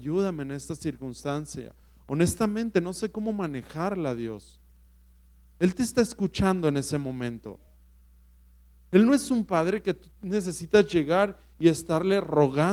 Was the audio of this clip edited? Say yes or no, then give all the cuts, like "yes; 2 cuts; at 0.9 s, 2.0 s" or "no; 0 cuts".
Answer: no; 0 cuts